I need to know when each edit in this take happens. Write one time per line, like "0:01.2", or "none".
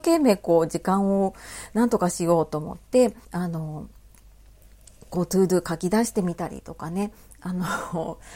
0:03.2